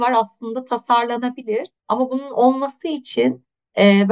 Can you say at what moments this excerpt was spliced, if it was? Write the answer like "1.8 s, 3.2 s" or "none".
1.8 s